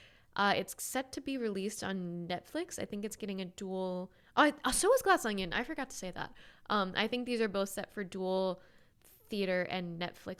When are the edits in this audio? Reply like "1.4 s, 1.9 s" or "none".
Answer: none